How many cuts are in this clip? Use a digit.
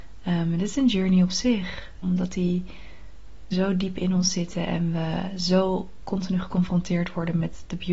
2